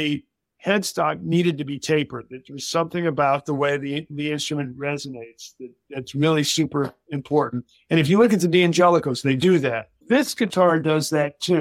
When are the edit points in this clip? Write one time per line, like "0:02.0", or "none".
0:10.0